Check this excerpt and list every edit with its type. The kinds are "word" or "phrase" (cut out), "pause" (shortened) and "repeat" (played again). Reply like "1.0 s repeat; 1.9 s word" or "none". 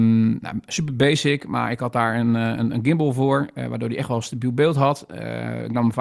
none